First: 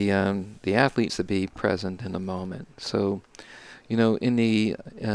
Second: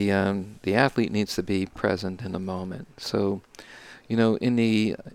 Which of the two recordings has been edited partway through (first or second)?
first